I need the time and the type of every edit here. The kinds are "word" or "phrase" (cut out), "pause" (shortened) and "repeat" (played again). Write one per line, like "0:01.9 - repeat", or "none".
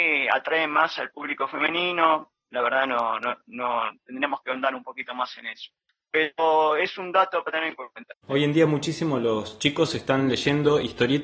none

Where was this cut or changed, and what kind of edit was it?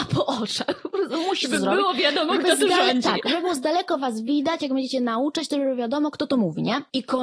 none

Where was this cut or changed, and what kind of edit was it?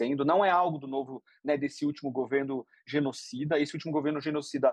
none

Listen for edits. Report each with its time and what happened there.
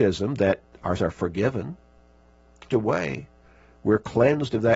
0:01.0 - word
0:02.7 - word

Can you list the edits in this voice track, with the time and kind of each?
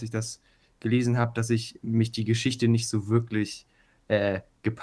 none

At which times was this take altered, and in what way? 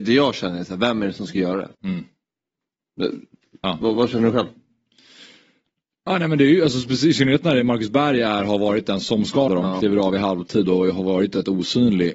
0:01.7 - pause
0:09.5 - word

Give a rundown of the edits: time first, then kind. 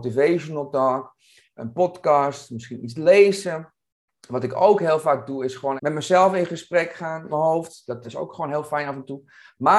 0:05.8 - word
0:07.3 - word
0:08.0 - word

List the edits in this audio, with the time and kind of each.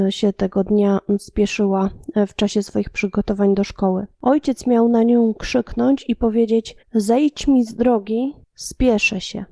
0:06.8 - pause
0:08.4 - pause

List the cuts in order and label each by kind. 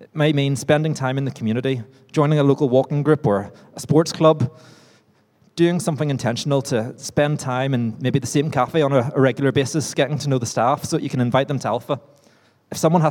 none

